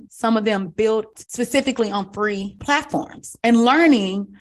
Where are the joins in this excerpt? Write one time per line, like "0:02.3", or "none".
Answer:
0:01.1